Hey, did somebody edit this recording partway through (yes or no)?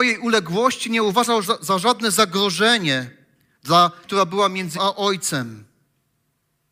yes